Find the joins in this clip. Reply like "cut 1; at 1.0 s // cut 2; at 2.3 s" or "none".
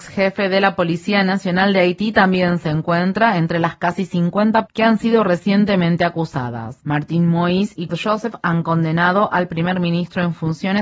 cut 1; at 4.7 s // cut 2; at 7.9 s